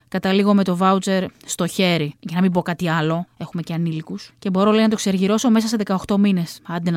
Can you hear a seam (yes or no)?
no